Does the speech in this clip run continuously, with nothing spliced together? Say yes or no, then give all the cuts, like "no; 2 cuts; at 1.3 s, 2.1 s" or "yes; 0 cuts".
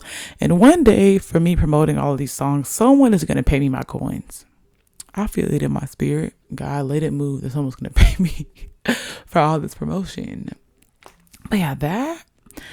no; 2 cuts; at 4.6 s, 6.4 s